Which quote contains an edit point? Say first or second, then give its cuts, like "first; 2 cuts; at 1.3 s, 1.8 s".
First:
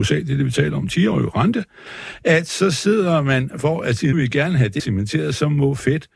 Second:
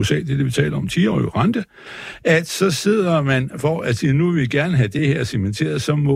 first; 2 cuts; at 4.1 s, 4.8 s